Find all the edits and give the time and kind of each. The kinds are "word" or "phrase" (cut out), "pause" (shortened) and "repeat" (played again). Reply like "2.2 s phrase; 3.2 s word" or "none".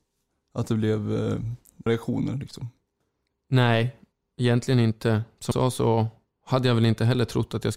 1.9 s word; 5.5 s word